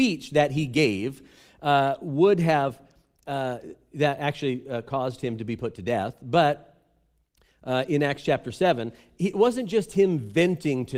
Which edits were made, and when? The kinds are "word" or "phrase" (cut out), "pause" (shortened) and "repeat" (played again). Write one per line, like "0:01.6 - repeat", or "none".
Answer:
none